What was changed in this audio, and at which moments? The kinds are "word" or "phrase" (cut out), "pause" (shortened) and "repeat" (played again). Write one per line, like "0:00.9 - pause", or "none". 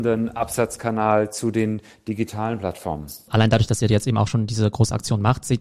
none